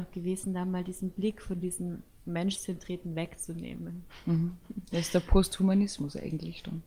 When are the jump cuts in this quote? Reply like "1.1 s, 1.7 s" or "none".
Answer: none

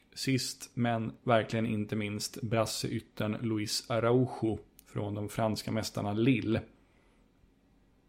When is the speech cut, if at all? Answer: none

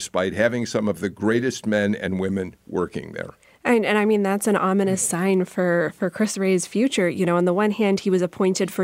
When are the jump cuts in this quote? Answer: none

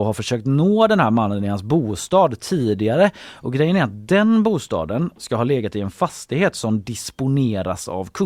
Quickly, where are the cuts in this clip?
none

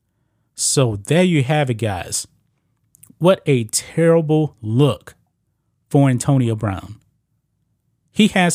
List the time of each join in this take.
none

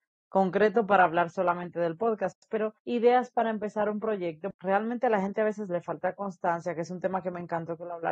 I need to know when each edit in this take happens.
2.8 s

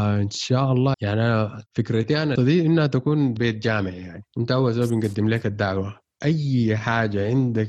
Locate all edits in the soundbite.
0.9 s, 1.7 s, 2.4 s, 3.4 s

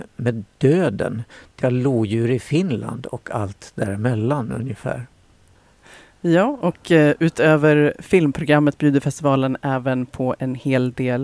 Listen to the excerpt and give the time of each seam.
1.6 s, 5.6 s

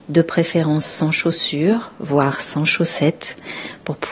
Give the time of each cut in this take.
none

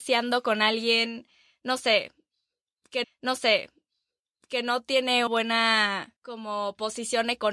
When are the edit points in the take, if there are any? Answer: 3.0 s, 5.3 s, 6.2 s

